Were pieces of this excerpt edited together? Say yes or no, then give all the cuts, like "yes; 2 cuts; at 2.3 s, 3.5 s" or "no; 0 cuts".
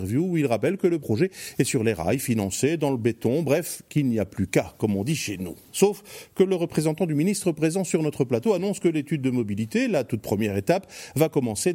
no; 0 cuts